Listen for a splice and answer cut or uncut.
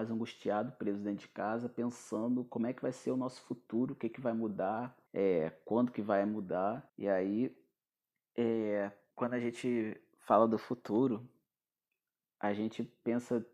cut